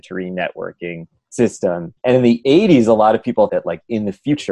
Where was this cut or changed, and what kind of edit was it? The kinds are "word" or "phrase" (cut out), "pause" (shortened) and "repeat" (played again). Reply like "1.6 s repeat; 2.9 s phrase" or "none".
2.0 s pause; 3.5 s word